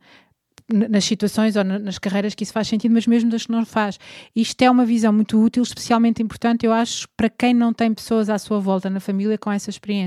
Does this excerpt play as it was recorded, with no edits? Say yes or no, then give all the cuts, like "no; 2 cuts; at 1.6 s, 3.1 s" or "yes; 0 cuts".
yes; 0 cuts